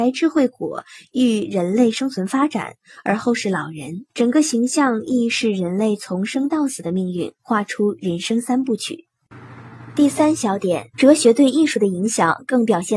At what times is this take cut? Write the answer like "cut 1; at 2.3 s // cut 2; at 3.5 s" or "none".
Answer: cut 1; at 4.1 s // cut 2; at 10.9 s